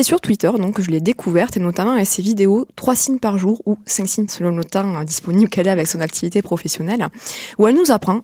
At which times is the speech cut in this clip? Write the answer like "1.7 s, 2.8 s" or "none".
4.3 s